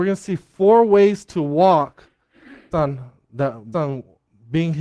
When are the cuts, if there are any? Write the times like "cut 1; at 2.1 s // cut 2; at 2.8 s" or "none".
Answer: cut 1; at 2.7 s // cut 2; at 3.7 s